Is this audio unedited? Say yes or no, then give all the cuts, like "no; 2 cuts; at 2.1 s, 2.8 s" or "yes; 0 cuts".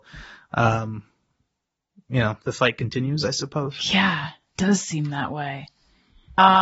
no; 1 cut; at 4.6 s